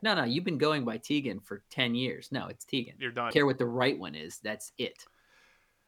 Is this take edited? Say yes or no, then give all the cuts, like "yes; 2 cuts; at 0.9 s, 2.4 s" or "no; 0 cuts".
yes; 1 cut; at 3.3 s